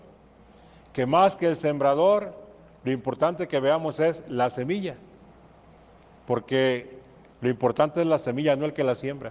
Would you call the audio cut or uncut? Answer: uncut